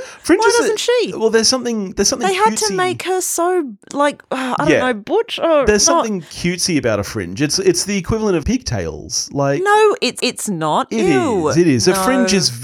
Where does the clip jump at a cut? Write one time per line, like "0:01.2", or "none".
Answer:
0:03.8
0:08.4
0:10.2